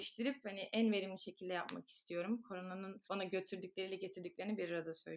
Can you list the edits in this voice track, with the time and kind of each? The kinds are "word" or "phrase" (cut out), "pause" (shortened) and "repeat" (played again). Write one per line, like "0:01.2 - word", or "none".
0:03.0 - pause